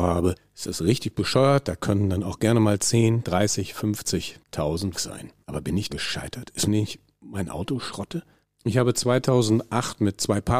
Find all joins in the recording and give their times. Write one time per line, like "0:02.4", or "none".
0:04.9
0:05.4
0:05.9
0:06.7
0:08.4